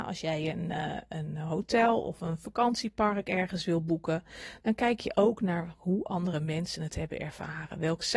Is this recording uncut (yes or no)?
yes